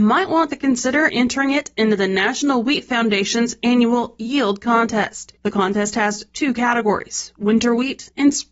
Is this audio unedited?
yes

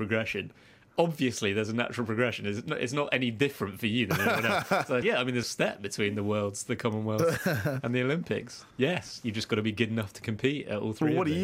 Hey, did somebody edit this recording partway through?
yes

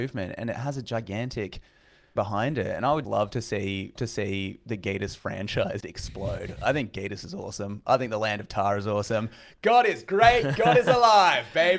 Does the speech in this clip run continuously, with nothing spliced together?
no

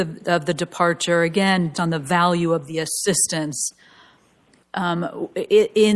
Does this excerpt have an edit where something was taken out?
yes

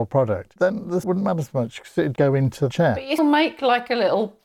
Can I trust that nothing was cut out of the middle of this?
no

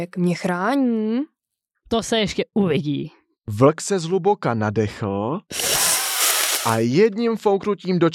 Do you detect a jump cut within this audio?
no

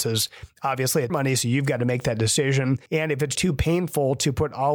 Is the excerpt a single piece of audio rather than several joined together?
no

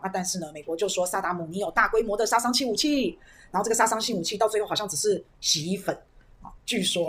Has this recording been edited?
no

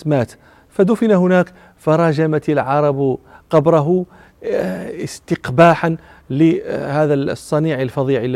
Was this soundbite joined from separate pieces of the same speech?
no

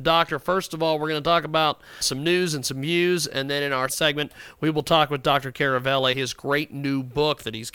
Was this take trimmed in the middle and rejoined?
yes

